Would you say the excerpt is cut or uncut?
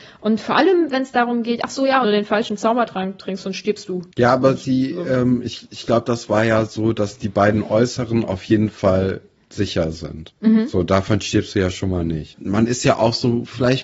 cut